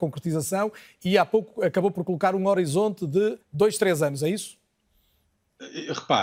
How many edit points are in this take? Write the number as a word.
one